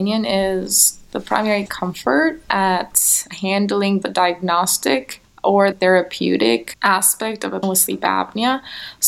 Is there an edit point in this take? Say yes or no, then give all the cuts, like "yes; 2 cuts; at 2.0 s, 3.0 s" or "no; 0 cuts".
yes; 4 cuts; at 1.7 s, 4.0 s, 5.7 s, 7.6 s